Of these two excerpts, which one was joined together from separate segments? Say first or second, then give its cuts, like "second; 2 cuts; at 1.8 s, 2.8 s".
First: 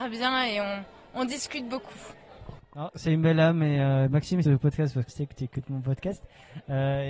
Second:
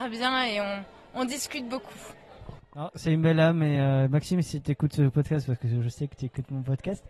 first; 2 cuts; at 4.4 s, 5.1 s